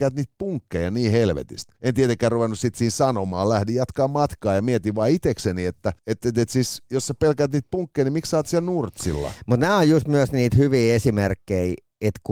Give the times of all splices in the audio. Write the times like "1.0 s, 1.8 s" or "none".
1.8 s, 6.0 s